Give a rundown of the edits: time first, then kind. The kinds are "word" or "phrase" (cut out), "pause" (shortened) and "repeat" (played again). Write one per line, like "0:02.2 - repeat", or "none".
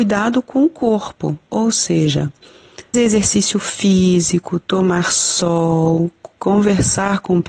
0:02.9 - word